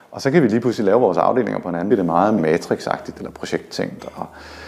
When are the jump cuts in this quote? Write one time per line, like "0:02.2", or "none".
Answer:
0:01.9
0:02.4
0:03.1